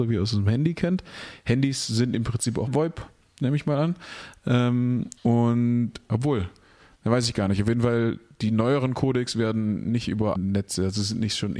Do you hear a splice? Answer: yes; 3 cuts; at 2.7 s, 5.2 s, 10.3 s

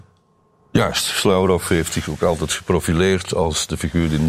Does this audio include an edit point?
no; 0 cuts

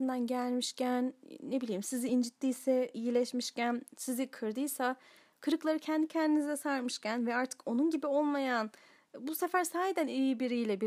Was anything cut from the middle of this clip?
no; 0 cuts

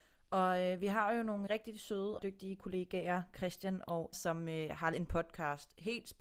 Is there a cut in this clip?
yes; 4 cuts; at 1.5 s, 2.2 s, 4.1 s, 4.9 s

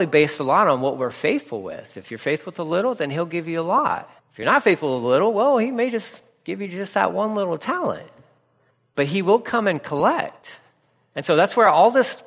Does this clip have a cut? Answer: yes; 1 cut; at 4.2 s

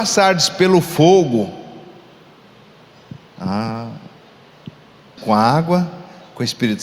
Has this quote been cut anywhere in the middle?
yes; 1 cut; at 5.2 s

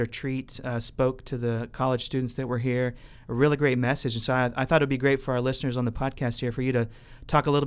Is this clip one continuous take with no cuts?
yes; 0 cuts

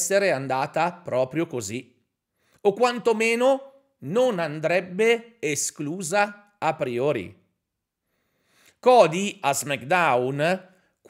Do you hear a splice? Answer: no; 0 cuts

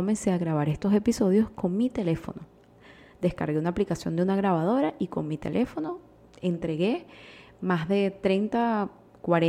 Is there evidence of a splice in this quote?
no; 0 cuts

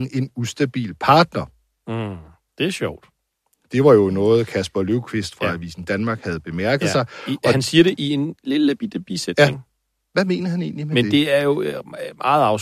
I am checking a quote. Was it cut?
no; 0 cuts

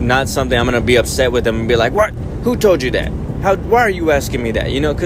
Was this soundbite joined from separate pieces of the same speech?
no; 0 cuts

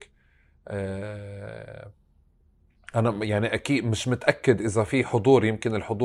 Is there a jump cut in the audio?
no; 0 cuts

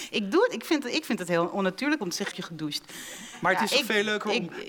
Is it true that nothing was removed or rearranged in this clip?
no; 2 cuts; at 2.0 s, 2.3 s

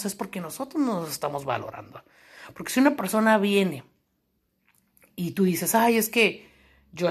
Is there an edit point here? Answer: no; 0 cuts

